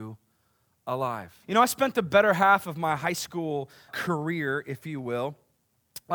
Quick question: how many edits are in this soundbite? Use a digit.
2